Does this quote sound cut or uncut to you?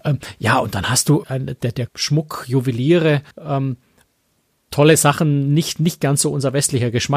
cut